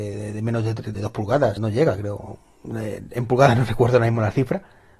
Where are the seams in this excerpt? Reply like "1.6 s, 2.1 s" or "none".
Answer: 0.9 s, 1.6 s

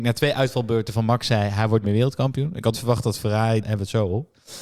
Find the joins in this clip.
1.8 s, 2.7 s, 3.6 s

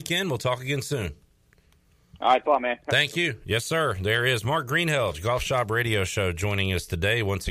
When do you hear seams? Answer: 2.4 s

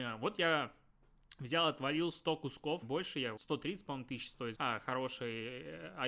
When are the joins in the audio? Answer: 2.8 s, 3.4 s, 4.5 s

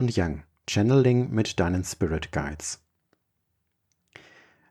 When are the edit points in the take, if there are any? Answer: none

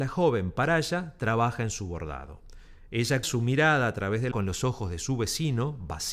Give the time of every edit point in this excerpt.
3.2 s, 4.3 s

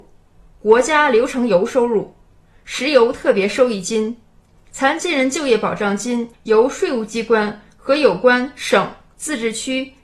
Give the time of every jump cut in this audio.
6.3 s

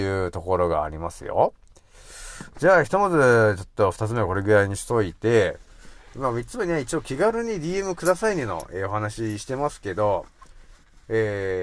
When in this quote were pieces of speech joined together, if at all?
none

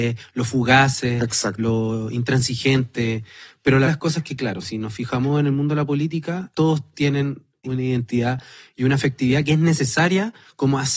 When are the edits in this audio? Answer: 1.6 s, 3.8 s, 6.5 s, 7.6 s

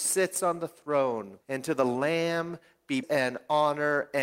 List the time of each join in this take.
1.4 s, 3.0 s

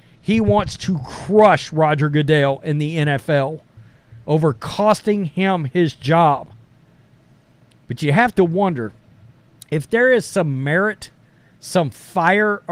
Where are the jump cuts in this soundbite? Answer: none

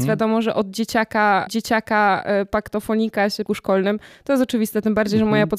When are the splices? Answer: 1.5 s, 3.5 s

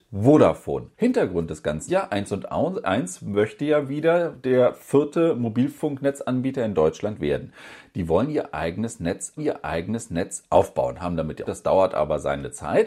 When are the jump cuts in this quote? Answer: 0.9 s, 1.9 s, 9.4 s, 11.5 s

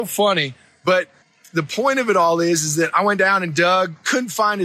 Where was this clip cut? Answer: 1.2 s

